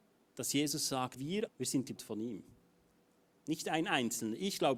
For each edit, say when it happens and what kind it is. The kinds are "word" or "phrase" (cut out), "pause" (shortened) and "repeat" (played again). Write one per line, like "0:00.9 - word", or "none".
0:01.2 - word
0:01.5 - phrase
0:02.0 - word